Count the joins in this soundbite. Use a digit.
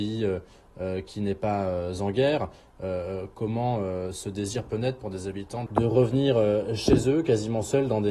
1